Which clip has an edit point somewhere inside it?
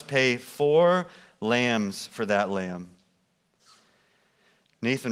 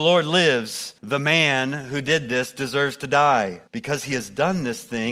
second; 2 cuts; at 1.0 s, 3.7 s

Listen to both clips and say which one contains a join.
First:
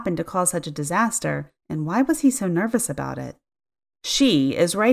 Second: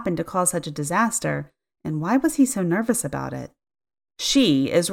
first; 1 cut; at 1.6 s

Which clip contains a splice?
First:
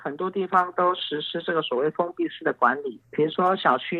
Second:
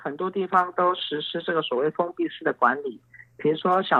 first; 1 cut; at 3.0 s

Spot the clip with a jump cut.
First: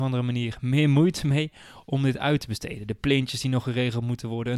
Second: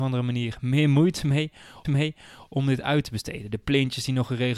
second; 1 cut; at 1.8 s

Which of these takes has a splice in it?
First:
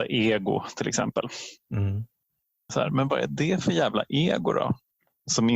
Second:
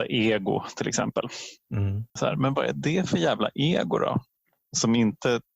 second; 1 cut; at 2.1 s

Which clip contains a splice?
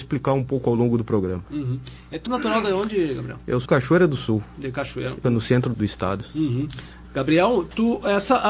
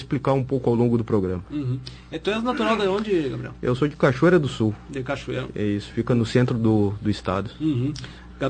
first; 4 cuts; at 2.3 s, 3.7 s, 5.2 s, 5.7 s

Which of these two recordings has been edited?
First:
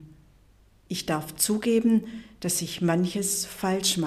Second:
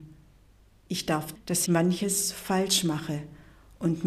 second; 2 cuts; at 1.4 s, 1.7 s

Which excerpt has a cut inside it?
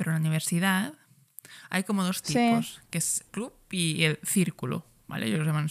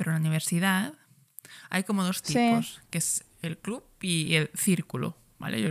first; 1 cut; at 3.3 s

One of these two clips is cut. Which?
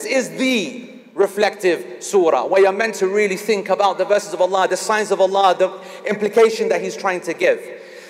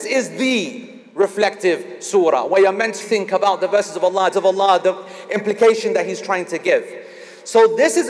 second; 2 cuts; at 3.0 s, 4.3 s

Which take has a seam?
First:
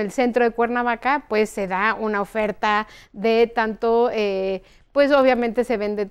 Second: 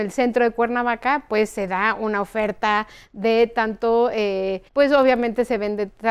second; 1 cut; at 4.7 s

